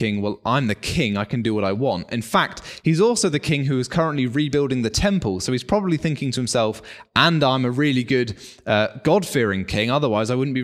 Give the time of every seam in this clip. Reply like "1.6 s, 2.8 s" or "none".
none